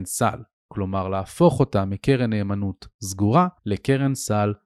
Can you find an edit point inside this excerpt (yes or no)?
yes